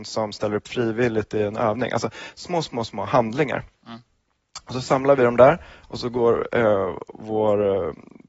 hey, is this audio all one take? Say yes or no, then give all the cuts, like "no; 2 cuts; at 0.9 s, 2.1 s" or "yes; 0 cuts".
yes; 0 cuts